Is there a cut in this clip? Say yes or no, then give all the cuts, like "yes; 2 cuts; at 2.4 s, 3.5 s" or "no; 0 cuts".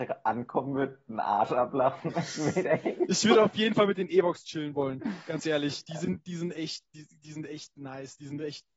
no; 0 cuts